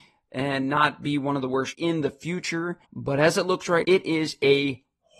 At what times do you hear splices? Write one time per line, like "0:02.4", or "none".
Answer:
0:01.7
0:02.8
0:03.8